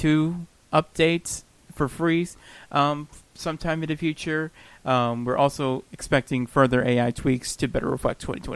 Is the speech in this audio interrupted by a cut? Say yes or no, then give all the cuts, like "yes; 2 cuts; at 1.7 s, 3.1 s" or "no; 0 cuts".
no; 0 cuts